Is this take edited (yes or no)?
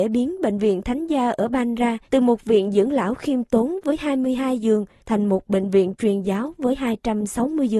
yes